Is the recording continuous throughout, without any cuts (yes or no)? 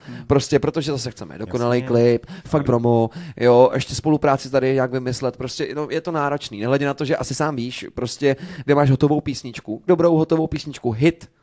no